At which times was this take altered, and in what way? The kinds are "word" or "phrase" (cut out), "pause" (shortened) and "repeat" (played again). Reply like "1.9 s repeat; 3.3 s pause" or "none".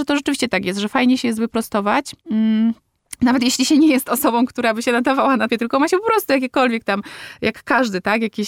2.2 s pause; 5.5 s word

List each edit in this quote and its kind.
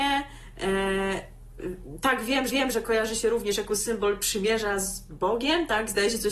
2.5 s repeat

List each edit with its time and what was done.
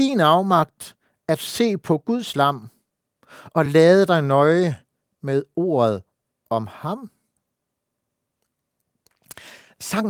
none

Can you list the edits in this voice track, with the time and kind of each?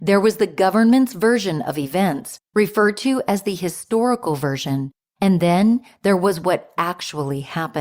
none

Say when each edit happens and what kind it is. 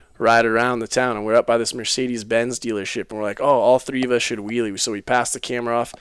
none

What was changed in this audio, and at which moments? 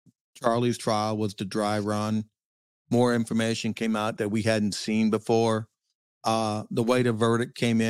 4.2 s phrase

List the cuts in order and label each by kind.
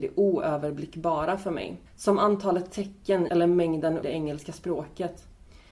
1.9 s pause; 3.3 s phrase; 4.0 s phrase

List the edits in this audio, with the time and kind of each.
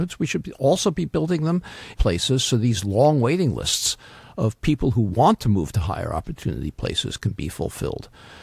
1.9 s phrase

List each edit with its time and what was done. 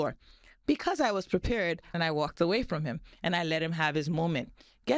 1.9 s phrase

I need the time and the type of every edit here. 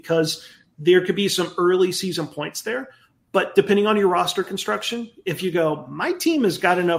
none

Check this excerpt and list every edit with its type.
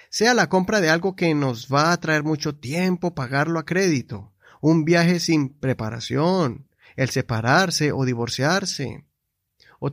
none

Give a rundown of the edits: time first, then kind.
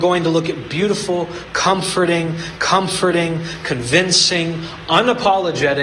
2.6 s repeat

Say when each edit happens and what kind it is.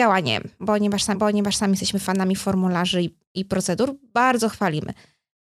1.1 s repeat

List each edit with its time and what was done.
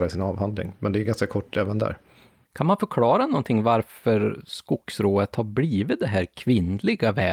none

